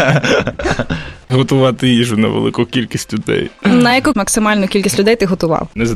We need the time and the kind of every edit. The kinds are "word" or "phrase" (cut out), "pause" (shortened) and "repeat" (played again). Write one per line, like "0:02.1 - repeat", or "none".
none